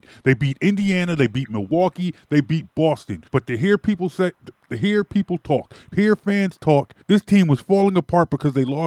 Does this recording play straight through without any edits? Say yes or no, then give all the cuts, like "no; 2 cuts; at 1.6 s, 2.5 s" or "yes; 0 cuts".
no; 3 cuts; at 3.3 s, 5.9 s, 7.0 s